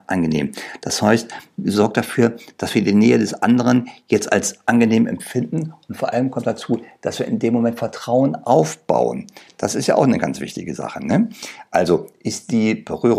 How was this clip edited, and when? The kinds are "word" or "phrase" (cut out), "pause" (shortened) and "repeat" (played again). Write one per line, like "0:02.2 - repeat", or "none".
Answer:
none